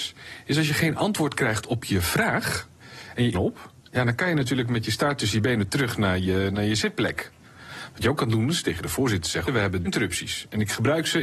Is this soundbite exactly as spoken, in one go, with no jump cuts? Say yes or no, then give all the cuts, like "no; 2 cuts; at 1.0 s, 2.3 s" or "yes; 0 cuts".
no; 3 cuts; at 3.3 s, 9.5 s, 9.8 s